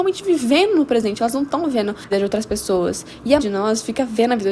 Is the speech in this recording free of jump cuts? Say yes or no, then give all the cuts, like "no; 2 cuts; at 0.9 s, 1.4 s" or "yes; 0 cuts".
no; 2 cuts; at 2.1 s, 3.4 s